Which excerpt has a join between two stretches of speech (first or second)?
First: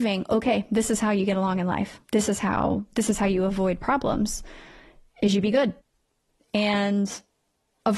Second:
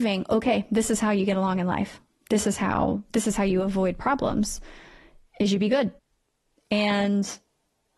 first